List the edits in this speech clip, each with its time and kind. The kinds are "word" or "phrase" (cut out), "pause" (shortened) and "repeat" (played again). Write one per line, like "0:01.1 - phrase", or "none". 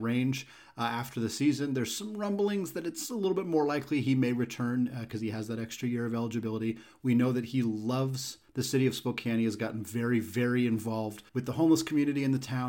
0:08.5 - pause
0:11.3 - pause